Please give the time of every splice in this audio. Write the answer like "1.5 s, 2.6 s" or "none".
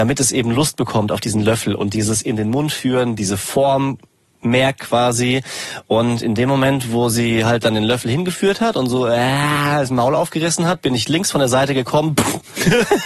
none